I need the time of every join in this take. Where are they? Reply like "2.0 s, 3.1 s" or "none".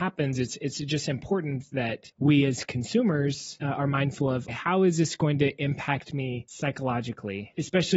4.5 s